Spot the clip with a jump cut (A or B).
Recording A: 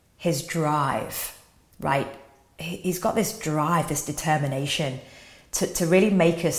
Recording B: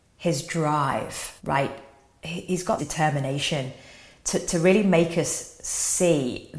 B